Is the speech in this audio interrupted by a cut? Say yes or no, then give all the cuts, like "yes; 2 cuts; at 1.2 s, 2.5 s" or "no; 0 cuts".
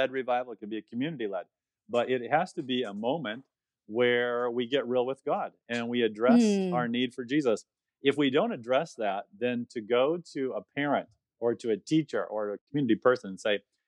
no; 0 cuts